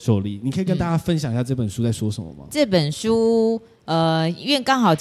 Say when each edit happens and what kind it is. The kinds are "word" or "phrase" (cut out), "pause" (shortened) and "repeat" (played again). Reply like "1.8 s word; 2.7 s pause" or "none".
none